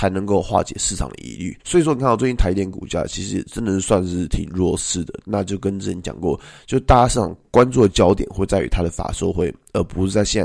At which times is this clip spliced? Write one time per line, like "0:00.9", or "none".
0:01.6